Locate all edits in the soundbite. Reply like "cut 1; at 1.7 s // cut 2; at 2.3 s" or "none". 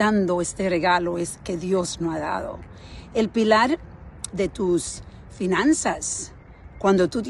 cut 1; at 4.3 s